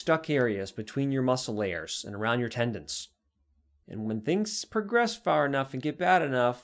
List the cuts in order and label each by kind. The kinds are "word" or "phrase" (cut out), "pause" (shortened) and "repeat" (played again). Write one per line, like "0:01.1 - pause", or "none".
none